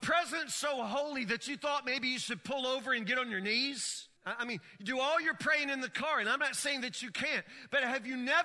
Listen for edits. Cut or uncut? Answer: cut